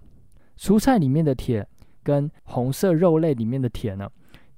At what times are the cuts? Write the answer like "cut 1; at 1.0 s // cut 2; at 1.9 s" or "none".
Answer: cut 1; at 2.4 s